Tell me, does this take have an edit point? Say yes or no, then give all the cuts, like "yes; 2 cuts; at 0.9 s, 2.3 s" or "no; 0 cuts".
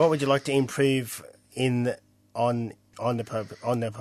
no; 0 cuts